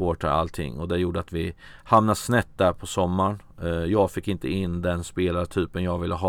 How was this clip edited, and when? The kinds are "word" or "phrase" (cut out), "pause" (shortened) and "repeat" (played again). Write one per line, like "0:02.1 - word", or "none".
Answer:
none